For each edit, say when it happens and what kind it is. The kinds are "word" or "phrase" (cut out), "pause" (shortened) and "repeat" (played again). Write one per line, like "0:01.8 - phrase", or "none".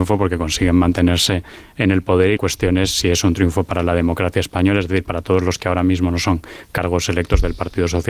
0:02.4 - word

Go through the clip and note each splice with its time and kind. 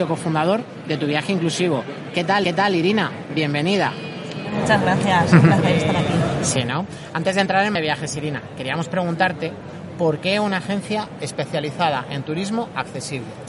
0:02.4 - repeat
0:07.7 - word

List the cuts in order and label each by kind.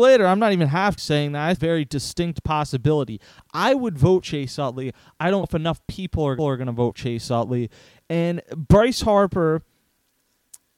0:01.0 - word
0:01.6 - phrase
0:04.2 - word
0:05.4 - word
0:06.4 - repeat
0:06.9 - word

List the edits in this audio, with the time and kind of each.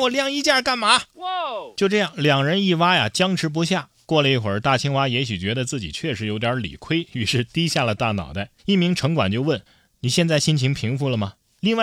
0:08.6 - pause
0:09.7 - pause

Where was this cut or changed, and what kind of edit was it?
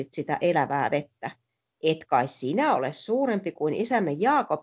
none

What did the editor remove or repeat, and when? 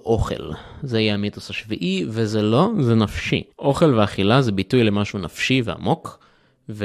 0:03.5 - pause

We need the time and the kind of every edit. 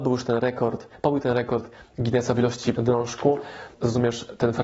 0:02.7 - word
0:03.7 - word

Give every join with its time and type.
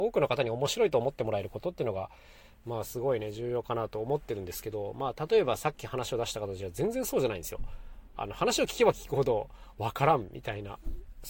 none

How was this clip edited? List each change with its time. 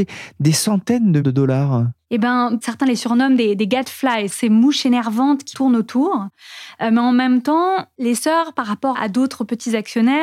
0:01.2 - word
0:04.3 - word
0:05.5 - word
0:08.9 - word

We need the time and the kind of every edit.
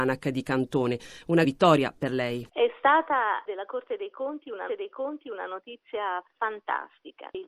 0:01.4 - word
0:03.5 - word
0:04.7 - repeat

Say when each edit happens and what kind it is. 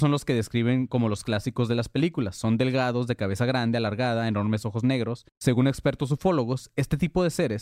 0:05.3 - pause

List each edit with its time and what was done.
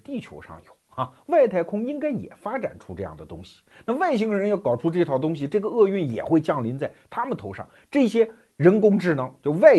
none

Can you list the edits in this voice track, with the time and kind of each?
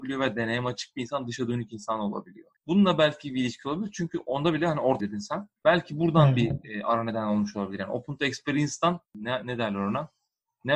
0:02.6 - pause
0:05.0 - word
0:05.6 - pause
0:09.1 - pause

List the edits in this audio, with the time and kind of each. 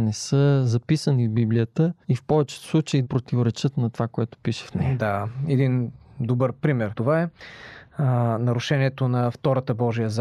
0:02.0 - pause
0:03.0 - word
0:06.9 - word

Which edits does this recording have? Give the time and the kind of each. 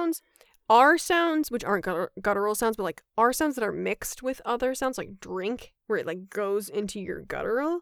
0:05.8 - pause

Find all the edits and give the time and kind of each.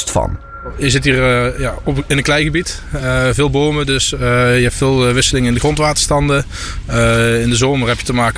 none

